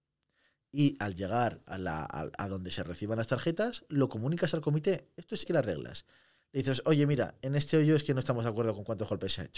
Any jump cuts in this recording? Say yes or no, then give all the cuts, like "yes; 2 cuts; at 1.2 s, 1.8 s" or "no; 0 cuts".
yes; 1 cut; at 5.5 s